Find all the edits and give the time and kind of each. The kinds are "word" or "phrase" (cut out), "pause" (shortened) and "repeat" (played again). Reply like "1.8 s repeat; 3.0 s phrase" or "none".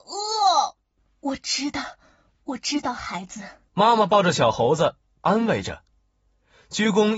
3.7 s pause